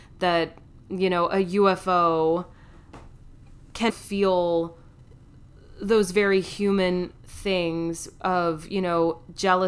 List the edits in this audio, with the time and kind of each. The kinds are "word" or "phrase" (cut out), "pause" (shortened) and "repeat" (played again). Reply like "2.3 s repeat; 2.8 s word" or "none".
3.9 s word